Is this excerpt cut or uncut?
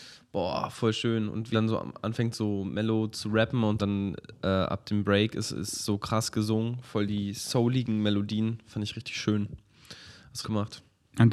cut